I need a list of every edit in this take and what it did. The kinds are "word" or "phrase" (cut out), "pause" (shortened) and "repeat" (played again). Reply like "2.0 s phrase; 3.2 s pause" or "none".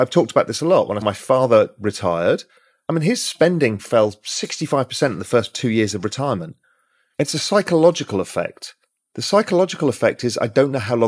1.0 s word; 3.8 s word